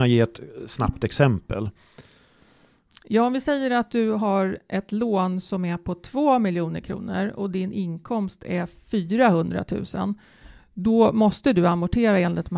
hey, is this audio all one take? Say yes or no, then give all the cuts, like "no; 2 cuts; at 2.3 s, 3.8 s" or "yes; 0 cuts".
yes; 0 cuts